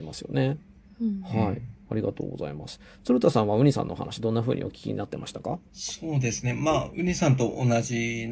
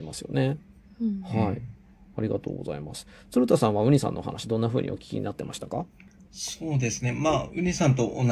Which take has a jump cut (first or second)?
first